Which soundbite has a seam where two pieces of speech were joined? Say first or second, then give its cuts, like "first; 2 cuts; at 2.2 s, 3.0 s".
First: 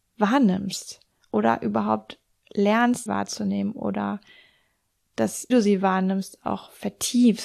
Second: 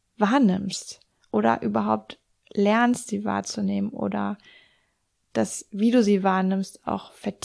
first; 2 cuts; at 3.1 s, 5.5 s